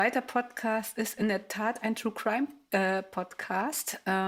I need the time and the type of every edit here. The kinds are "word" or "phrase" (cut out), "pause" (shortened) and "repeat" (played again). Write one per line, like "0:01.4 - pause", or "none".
none